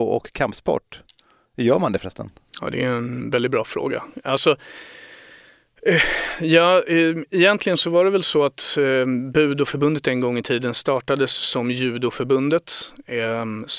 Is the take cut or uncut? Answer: uncut